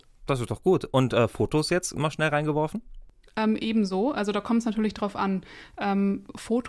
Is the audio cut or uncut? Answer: uncut